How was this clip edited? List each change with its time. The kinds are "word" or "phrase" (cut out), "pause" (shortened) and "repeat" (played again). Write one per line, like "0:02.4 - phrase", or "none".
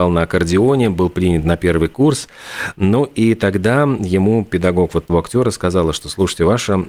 0:05.1 - word

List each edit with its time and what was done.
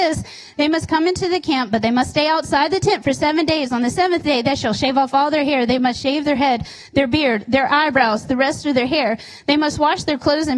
none

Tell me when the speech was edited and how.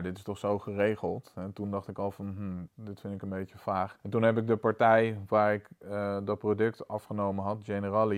0:02.7 - word
0:04.0 - pause

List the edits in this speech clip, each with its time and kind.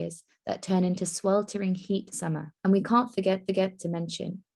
0:02.1 - phrase
0:02.6 - pause
0:03.5 - repeat

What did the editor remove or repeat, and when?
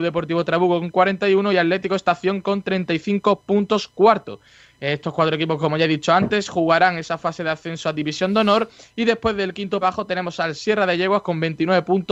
0:09.8 - word

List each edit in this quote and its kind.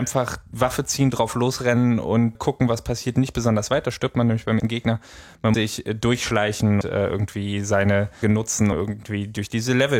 0:02.3 - word
0:04.6 - word
0:05.5 - word
0:06.8 - word
0:08.2 - word
0:08.7 - word

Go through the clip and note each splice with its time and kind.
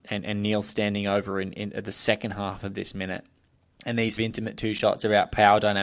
0:03.6 - pause
0:04.2 - phrase

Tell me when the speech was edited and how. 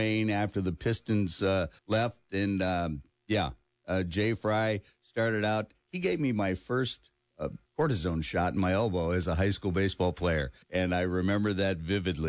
0:01.8 - pause
0:07.7 - pause
0:10.6 - pause

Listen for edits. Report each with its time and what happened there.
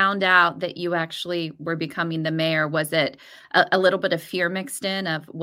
none

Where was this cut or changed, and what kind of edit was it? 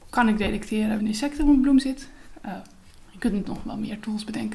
0:01.0 - phrase

